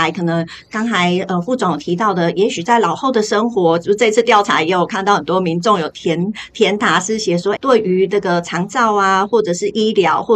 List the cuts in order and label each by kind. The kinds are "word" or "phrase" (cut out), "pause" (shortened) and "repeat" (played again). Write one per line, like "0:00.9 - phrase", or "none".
0:07.5 - word

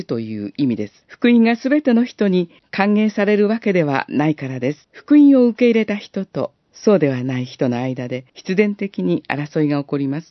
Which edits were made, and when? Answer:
0:01.0 - pause
0:02.6 - pause
0:04.8 - pause
0:06.6 - pause
0:08.3 - pause

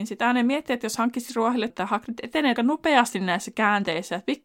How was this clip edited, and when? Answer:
0:01.7 - word
0:02.6 - phrase

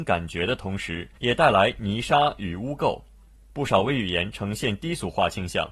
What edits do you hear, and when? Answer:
0:01.2 - pause

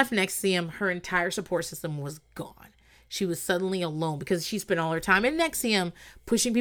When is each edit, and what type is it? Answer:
none

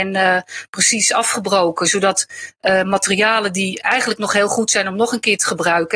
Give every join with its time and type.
none

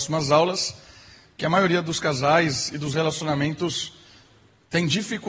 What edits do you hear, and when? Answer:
none

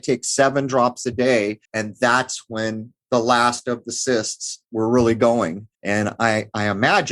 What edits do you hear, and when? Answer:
0:01.6 - pause
0:04.6 - pause
0:05.7 - pause

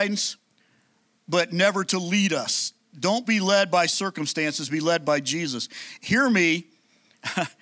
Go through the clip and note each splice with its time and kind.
none

